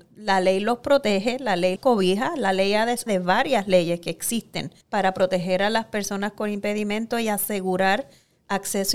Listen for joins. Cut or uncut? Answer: cut